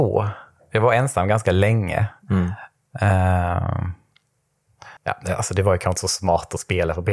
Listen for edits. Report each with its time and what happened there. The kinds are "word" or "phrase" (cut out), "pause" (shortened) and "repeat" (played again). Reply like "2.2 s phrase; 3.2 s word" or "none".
5.0 s pause